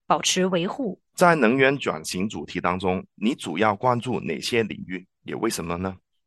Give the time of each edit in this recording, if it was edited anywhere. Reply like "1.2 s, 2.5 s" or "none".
1.1 s, 5.1 s